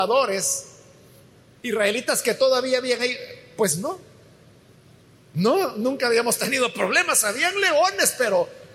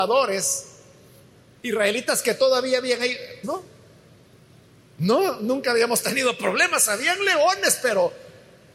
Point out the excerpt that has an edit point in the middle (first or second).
second